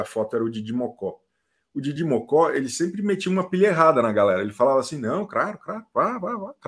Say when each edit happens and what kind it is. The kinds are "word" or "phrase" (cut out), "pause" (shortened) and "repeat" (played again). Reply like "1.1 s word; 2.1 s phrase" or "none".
none